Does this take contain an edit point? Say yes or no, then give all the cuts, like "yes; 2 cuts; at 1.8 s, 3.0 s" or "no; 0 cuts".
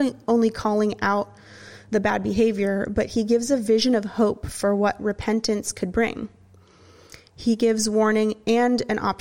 no; 0 cuts